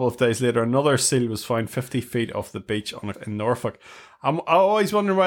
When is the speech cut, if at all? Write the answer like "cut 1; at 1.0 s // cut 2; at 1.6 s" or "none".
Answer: cut 1; at 3.1 s